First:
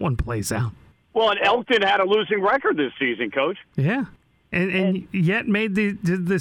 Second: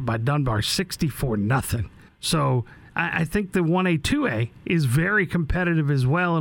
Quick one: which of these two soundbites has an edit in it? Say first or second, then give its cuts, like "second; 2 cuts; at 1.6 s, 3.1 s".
second; 1 cut; at 2.1 s